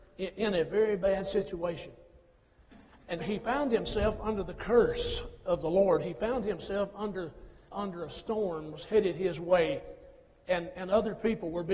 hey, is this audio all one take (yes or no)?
no